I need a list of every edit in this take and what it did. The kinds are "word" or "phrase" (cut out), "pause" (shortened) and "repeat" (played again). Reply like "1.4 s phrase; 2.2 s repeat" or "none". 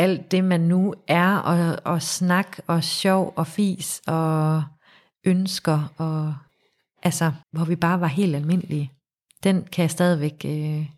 7.4 s pause